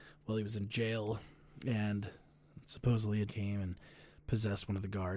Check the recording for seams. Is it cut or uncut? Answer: cut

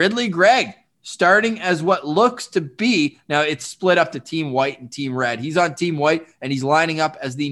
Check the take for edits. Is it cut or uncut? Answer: uncut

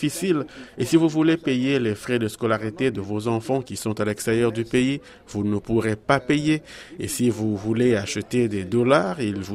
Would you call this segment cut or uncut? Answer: uncut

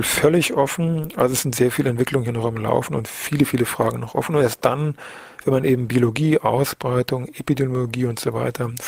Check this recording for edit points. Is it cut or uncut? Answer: uncut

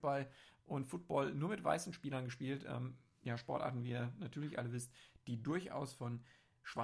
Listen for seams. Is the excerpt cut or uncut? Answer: uncut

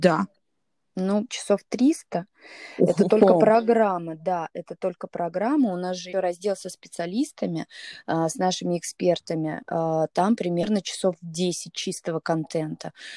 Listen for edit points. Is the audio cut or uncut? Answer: cut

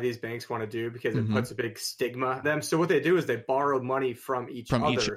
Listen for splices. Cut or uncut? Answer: cut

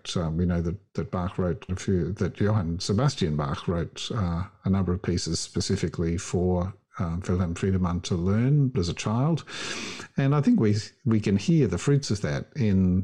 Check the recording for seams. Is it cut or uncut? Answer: cut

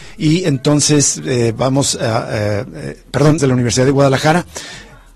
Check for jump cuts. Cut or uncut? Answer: cut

